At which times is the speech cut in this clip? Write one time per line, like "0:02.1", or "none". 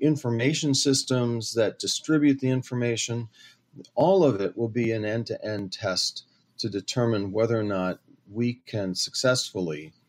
none